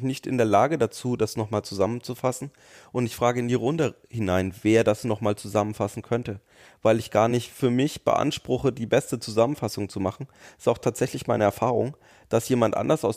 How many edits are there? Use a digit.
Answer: 0